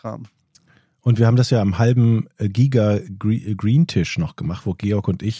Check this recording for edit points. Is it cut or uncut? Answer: uncut